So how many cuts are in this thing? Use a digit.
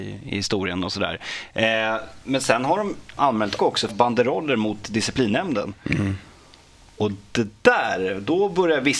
3